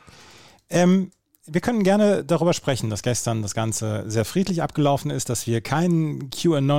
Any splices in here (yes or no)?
no